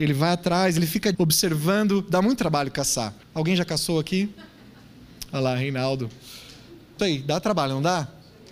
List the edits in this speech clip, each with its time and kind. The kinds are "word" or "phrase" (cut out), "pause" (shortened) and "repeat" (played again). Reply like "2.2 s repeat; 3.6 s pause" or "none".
1.1 s phrase; 3.2 s pause; 7.0 s word